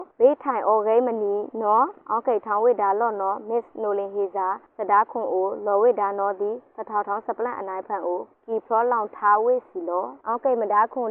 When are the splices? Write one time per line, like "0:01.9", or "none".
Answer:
0:10.2